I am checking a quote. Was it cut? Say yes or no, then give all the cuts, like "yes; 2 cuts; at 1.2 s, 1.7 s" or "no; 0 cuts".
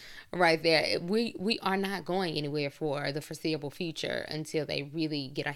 no; 0 cuts